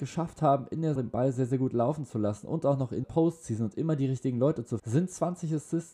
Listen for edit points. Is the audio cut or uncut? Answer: cut